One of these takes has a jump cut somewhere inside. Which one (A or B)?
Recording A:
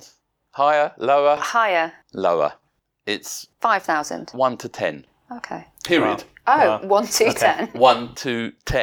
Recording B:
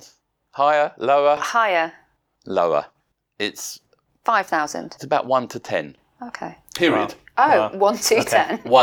A